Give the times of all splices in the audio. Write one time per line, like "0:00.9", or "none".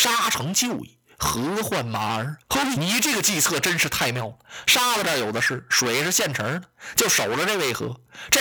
0:02.4
0:02.7